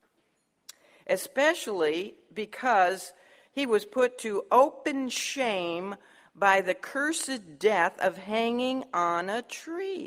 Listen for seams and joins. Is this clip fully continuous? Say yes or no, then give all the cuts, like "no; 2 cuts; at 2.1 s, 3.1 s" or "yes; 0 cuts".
yes; 0 cuts